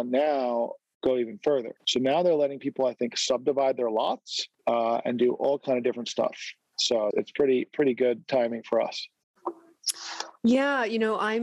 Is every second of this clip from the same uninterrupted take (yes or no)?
no